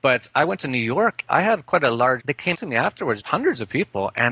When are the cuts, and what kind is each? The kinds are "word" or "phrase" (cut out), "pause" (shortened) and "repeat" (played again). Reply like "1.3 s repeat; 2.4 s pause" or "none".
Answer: 1.2 s word; 2.2 s phrase; 2.5 s word; 3.2 s word